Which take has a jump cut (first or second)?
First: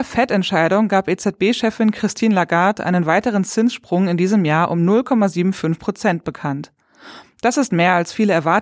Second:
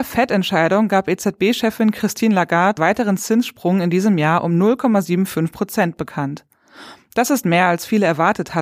second